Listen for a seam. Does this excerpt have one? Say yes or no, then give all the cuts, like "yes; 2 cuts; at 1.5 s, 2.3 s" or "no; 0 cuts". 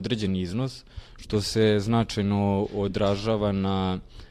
no; 0 cuts